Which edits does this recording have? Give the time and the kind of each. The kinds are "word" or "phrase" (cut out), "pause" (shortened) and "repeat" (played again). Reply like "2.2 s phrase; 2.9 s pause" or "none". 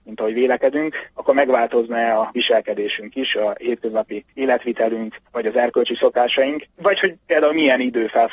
5.3 s pause